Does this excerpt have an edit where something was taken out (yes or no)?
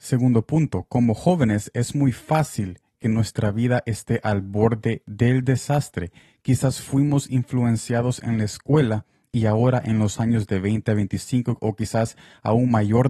no